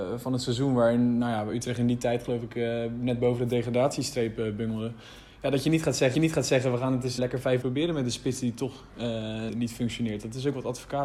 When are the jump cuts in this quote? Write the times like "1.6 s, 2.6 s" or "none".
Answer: 6.1 s, 7.2 s, 7.6 s, 9.5 s